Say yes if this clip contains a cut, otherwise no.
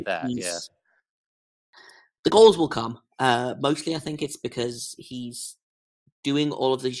no